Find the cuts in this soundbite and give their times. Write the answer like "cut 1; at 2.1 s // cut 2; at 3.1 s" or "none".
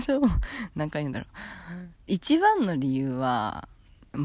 cut 1; at 2.0 s